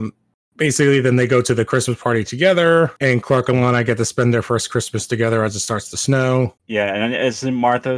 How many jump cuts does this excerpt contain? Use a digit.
2